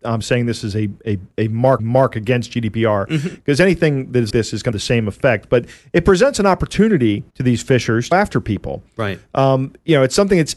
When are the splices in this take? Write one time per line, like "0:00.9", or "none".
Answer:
0:01.3
0:01.8
0:04.3
0:04.7
0:07.3
0:08.1

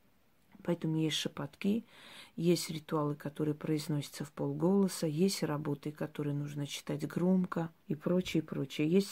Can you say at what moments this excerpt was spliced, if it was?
0:07.8

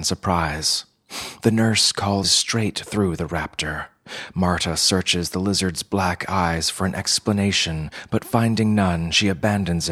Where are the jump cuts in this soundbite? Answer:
0:02.2

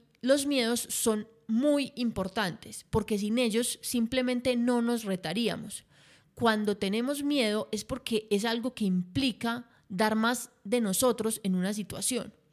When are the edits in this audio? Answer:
none

